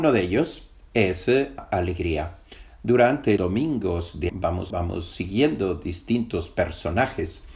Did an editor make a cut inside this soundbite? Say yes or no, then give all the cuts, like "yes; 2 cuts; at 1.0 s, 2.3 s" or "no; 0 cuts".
yes; 4 cuts; at 1.6 s, 3.4 s, 4.3 s, 4.7 s